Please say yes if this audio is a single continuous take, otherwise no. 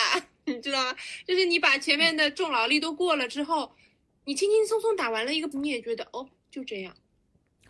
no